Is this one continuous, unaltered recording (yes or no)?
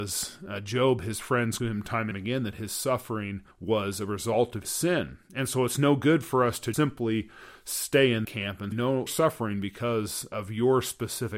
no